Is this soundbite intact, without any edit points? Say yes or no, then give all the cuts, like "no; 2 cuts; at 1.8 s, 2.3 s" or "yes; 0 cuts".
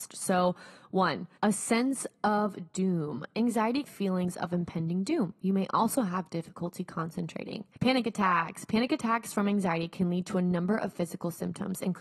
no; 3 cuts; at 1.3 s, 3.8 s, 7.7 s